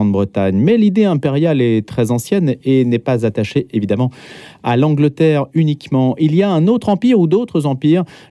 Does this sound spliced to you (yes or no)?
no